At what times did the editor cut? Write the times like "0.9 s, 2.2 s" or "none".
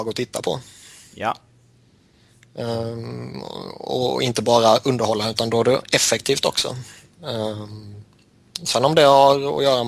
none